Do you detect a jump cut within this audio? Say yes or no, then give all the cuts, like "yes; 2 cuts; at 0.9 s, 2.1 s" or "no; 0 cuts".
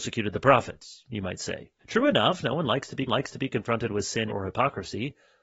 yes; 3 cuts; at 1.8 s, 3.1 s, 4.3 s